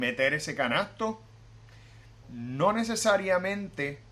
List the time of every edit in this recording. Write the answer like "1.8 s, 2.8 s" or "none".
2.2 s